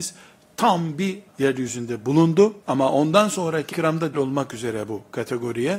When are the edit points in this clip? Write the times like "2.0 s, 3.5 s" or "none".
1.3 s, 2.6 s, 3.7 s, 4.1 s